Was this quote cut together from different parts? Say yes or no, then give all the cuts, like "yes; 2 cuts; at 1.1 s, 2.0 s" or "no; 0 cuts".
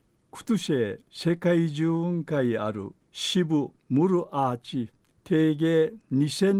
yes; 4 cuts; at 1.0 s, 3.0 s, 3.8 s, 5.1 s